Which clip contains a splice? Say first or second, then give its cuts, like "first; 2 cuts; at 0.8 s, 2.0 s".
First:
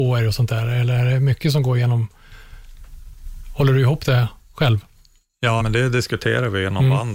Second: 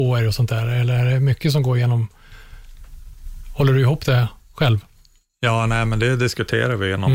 first; 1 cut; at 5.6 s